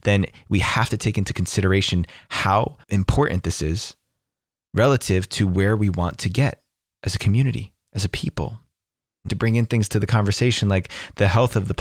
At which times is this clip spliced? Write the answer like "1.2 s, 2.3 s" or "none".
2.8 s, 9.3 s